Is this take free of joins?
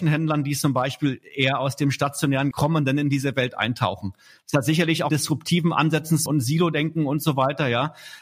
no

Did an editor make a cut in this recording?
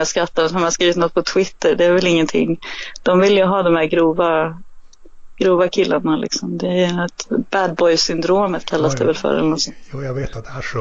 no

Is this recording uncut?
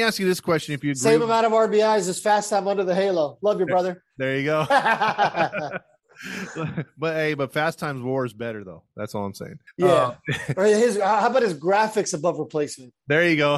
no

